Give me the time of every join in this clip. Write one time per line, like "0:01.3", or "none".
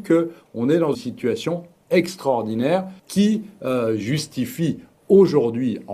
0:00.9
0:03.0